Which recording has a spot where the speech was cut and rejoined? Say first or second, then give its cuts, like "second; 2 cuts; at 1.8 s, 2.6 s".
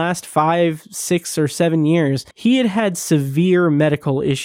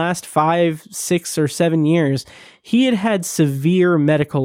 first; 1 cut; at 2.3 s